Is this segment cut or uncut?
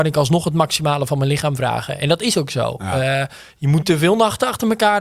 cut